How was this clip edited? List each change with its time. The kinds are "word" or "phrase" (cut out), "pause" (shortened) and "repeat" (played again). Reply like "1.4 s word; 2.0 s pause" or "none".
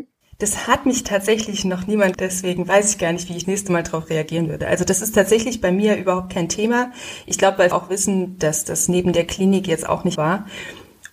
2.1 s word; 3.4 s word; 7.7 s word; 10.2 s word